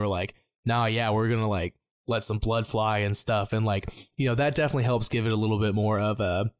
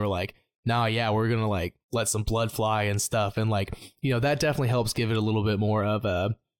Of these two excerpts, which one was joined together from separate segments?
second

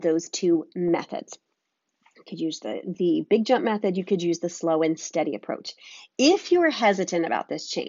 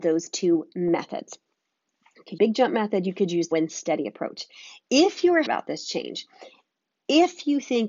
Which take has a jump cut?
second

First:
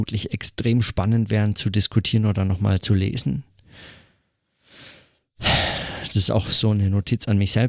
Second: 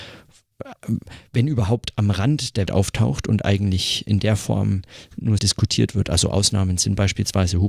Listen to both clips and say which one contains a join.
second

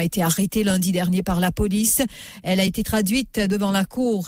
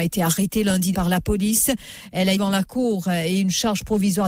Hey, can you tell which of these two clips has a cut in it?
second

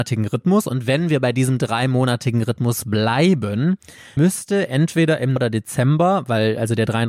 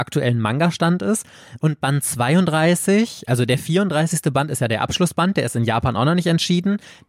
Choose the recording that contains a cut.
first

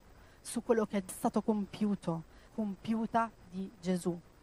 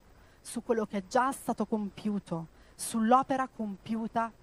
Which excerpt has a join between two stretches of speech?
first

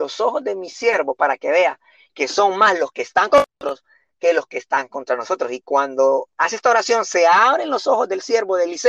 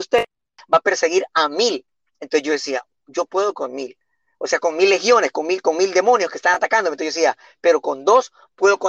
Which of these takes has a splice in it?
first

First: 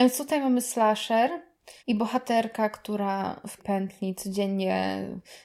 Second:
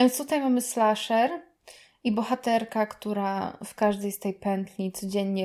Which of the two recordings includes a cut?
first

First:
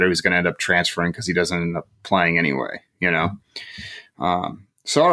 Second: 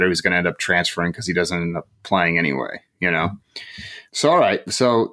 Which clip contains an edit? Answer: second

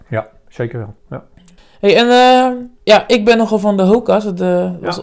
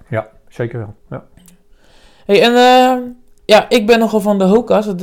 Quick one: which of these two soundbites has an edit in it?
first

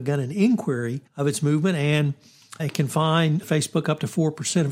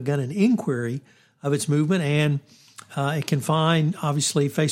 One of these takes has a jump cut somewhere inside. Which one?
first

